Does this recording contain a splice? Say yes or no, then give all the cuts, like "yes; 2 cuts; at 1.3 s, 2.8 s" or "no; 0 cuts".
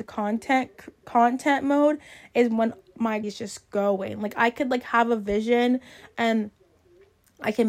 yes; 1 cut; at 3.2 s